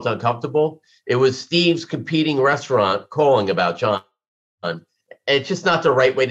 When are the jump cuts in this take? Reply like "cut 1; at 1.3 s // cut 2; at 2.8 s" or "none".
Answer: none